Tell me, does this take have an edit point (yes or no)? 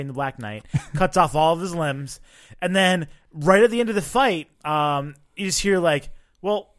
yes